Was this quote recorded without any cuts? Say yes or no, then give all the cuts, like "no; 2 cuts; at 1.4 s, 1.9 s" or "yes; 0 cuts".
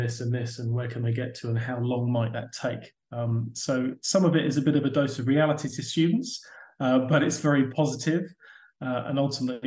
yes; 0 cuts